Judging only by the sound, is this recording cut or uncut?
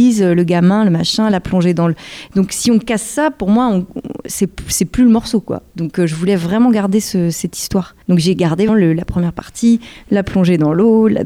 cut